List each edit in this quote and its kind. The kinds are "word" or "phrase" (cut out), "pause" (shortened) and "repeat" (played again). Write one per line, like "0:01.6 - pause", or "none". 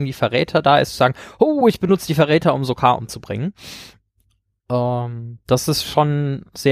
none